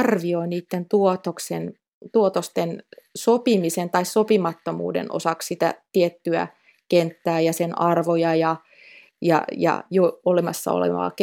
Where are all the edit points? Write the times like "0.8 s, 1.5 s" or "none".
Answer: none